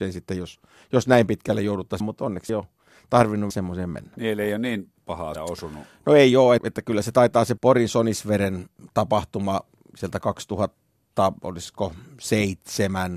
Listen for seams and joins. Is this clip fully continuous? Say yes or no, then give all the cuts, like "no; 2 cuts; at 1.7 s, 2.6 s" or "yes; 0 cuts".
no; 6 cuts; at 2.0 s, 2.5 s, 3.5 s, 5.4 s, 6.6 s, 7.6 s